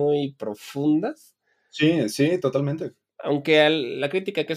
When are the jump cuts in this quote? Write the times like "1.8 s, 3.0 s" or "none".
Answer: none